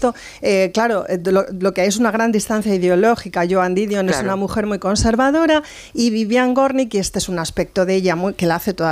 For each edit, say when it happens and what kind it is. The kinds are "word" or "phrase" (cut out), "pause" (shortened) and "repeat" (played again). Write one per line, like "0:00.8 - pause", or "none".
none